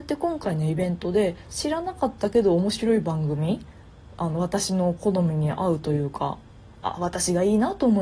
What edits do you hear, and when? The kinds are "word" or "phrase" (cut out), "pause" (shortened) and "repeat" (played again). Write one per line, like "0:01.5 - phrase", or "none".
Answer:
none